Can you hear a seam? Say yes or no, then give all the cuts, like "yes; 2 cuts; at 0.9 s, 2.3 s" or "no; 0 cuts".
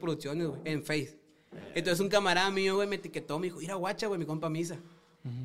no; 0 cuts